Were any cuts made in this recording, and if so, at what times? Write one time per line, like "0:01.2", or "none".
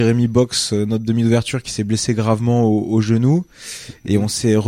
none